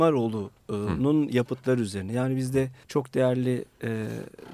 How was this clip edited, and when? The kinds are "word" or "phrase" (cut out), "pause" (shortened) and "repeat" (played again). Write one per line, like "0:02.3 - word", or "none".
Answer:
0:02.8 - pause